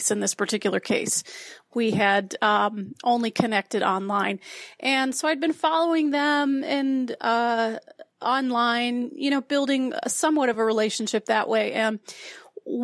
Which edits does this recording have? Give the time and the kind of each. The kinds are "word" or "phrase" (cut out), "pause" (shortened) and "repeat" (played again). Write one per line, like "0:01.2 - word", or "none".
none